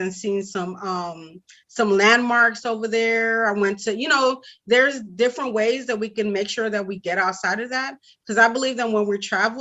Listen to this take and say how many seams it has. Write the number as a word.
zero